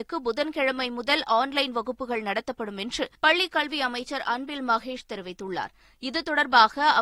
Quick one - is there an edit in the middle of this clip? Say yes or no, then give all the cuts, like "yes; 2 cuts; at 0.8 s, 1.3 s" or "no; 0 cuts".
yes; 1 cut; at 3.2 s